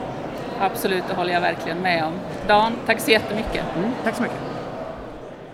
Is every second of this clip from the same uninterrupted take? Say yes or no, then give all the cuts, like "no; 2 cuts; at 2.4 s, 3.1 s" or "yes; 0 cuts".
yes; 0 cuts